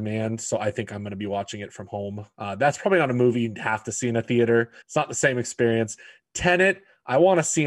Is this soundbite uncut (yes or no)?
no